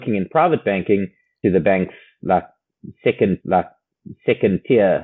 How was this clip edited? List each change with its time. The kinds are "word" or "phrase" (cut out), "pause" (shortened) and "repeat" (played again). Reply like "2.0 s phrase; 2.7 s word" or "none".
1.4 s phrase; 3.4 s repeat